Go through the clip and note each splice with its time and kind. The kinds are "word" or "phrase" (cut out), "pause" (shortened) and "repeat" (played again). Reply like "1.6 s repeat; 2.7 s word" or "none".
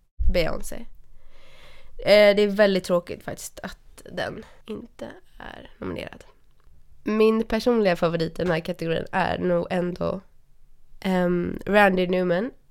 4.6 s pause